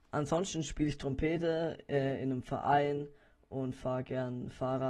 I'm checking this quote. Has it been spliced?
no; 0 cuts

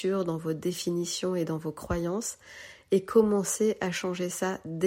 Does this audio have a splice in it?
no; 0 cuts

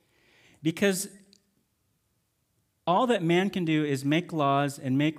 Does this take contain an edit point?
no; 0 cuts

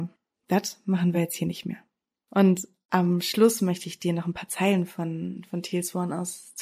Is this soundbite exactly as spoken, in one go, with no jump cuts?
yes; 0 cuts

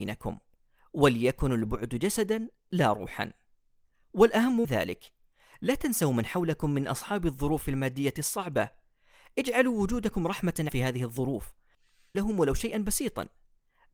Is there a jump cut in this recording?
yes; 3 cuts; at 4.6 s, 10.7 s, 12.1 s

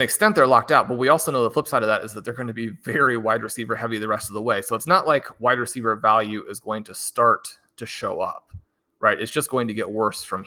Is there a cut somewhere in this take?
no; 0 cuts

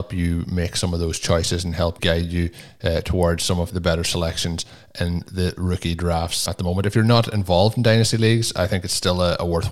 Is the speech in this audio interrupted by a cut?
yes; 3 cuts; at 2.0 s, 3.7 s, 6.5 s

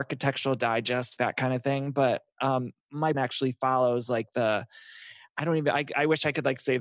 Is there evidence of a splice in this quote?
yes; 2 cuts; at 1.2 s, 3.1 s

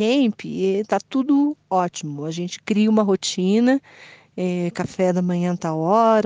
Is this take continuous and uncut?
yes; 0 cuts

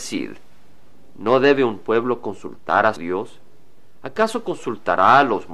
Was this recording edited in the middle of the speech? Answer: yes; 1 cut; at 3.0 s

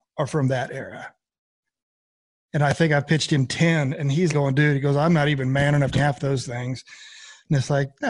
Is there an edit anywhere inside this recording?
yes; 2 cuts; at 4.3 s, 5.9 s

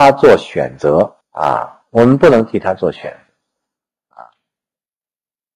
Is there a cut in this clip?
yes; 1 cut; at 1.2 s

